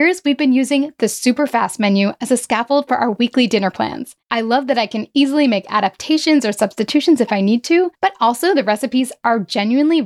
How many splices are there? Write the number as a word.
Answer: two